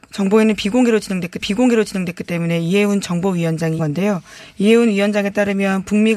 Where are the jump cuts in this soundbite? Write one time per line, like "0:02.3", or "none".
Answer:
0:01.4
0:03.8